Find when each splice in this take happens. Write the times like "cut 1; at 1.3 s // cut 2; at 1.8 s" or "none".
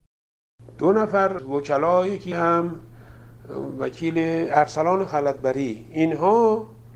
cut 1; at 1.4 s // cut 2; at 2.3 s